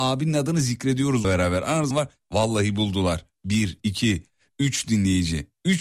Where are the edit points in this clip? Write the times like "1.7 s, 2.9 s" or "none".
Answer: 1.2 s, 1.9 s